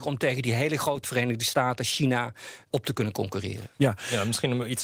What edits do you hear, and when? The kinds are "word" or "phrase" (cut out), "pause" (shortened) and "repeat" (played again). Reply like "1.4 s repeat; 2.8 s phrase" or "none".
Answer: 1.0 s word; 2.7 s word